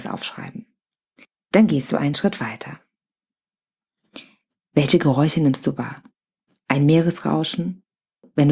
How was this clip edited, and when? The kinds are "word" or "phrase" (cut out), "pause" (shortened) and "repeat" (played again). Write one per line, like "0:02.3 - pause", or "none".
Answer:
none